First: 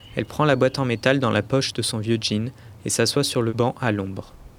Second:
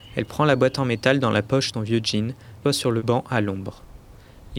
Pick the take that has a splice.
second; 2 cuts; at 1.7 s, 2.6 s

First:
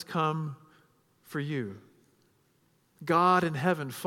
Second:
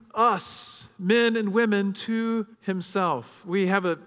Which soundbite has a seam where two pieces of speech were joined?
second; 1 cut; at 2.5 s

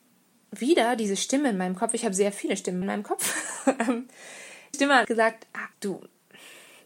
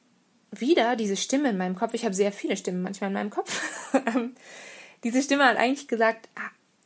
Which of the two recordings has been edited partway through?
first; 4 cuts; at 2.8 s, 4.7 s, 5.0 s, 5.7 s

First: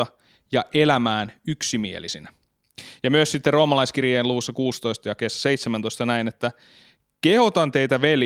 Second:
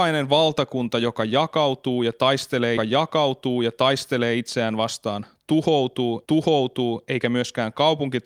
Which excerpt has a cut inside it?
second; 2 cuts; at 2.8 s, 6.3 s

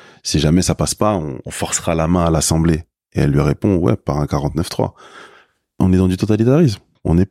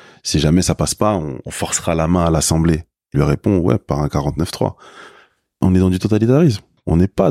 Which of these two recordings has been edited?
second; 1 cut; at 3.1 s

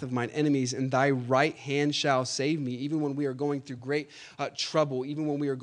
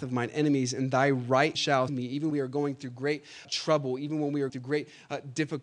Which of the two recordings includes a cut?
second; 5 cuts; at 1.5 s, 1.9 s, 2.3 s, 3.4 s, 4.5 s

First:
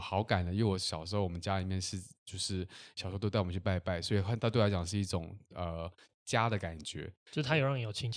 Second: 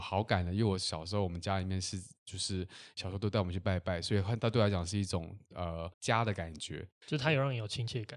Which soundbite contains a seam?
second; 1 cut; at 5.9 s

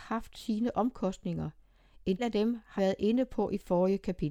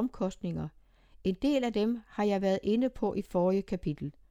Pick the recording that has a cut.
first; 2 cuts; at 2.2 s, 2.8 s

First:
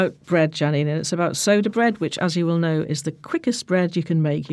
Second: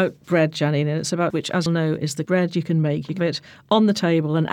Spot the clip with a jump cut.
second; 4 cuts; at 1.3 s, 1.7 s, 2.2 s, 3.2 s

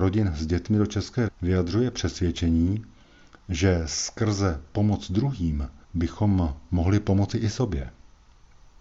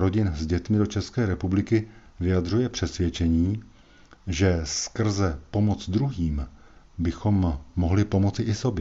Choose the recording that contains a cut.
first; 2 cuts; at 1.3 s, 5.8 s

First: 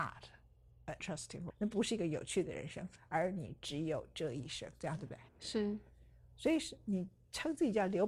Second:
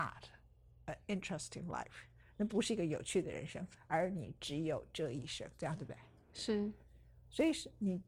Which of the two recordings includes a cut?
first; 3 cuts; at 1.0 s, 1.5 s, 5.3 s

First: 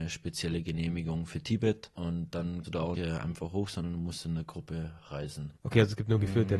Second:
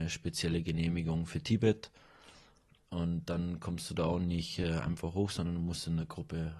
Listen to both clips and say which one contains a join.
first; 4 cuts; at 1.9 s, 2.6 s, 2.9 s, 5.6 s

